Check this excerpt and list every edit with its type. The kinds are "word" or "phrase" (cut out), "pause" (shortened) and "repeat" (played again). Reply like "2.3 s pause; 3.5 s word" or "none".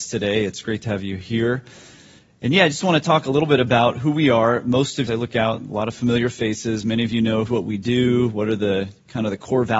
5.1 s phrase; 7.5 s phrase

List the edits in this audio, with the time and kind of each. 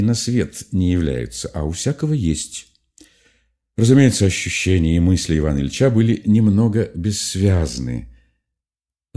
none

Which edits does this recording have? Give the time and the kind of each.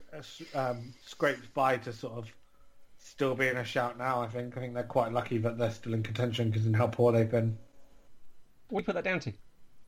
none

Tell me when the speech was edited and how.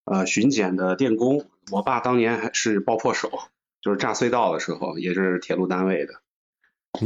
none

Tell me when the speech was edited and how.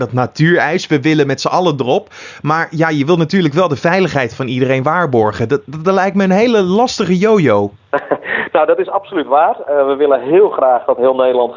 7.8 s pause

